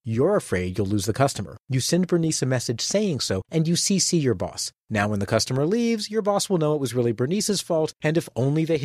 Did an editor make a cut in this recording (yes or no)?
yes